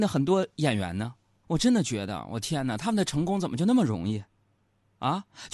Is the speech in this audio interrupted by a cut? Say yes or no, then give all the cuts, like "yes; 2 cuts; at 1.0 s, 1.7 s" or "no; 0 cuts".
yes; 1 cut; at 1.4 s